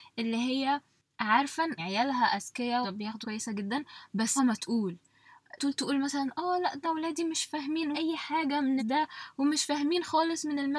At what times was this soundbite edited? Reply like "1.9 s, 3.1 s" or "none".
1.8 s, 2.8 s, 3.2 s, 4.4 s, 5.6 s, 6.8 s, 7.9 s, 8.8 s